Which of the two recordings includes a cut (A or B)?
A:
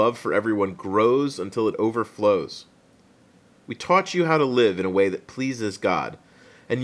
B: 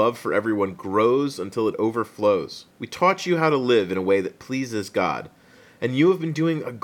B